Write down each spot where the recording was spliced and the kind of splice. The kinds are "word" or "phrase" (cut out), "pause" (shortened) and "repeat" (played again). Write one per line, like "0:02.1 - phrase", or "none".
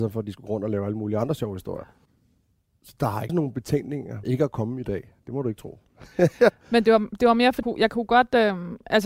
0:03.3 - word
0:04.2 - word
0:07.6 - word